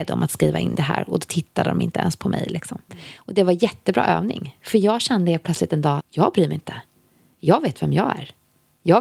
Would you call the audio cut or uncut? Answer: cut